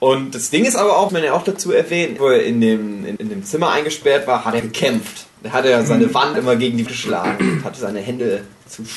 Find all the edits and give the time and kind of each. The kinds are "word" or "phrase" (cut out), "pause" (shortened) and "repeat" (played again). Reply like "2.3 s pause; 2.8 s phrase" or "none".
1.1 s word; 2.2 s phrase; 3.2 s word; 4.6 s word; 5.4 s pause; 6.3 s phrase; 6.9 s word